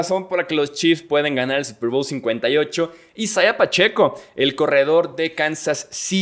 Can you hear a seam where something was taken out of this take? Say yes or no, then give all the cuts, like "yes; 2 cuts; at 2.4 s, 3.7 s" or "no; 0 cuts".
no; 0 cuts